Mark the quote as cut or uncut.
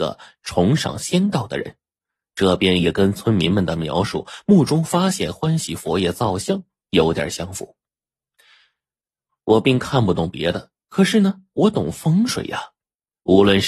uncut